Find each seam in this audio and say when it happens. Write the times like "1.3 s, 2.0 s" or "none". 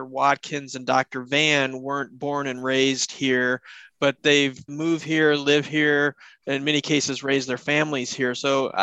4.7 s